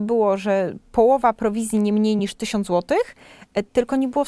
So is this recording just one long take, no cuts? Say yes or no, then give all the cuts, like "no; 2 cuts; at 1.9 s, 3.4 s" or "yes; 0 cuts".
yes; 0 cuts